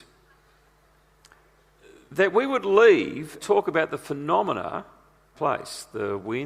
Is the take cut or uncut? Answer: cut